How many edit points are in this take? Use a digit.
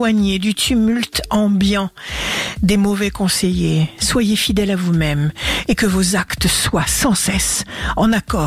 0